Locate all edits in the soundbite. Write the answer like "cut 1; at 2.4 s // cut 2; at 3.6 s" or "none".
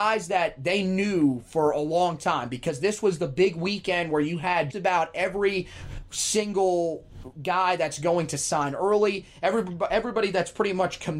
cut 1; at 4.7 s